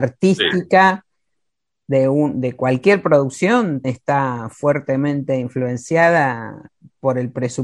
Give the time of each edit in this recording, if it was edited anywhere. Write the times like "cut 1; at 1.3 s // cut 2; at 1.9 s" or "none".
cut 1; at 3.8 s